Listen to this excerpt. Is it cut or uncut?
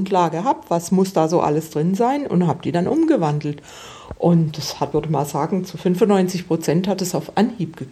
cut